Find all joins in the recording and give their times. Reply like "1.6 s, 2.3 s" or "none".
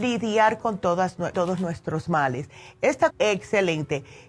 1.3 s, 3.1 s